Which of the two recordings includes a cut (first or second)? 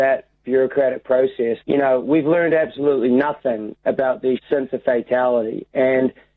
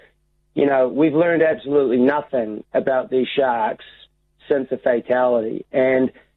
first